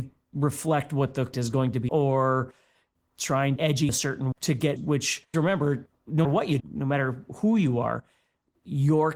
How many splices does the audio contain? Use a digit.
9